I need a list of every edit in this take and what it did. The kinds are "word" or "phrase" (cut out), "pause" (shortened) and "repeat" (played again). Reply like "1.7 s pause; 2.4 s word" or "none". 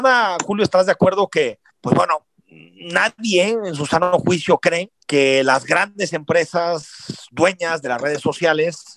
1.7 s pause; 5.0 s pause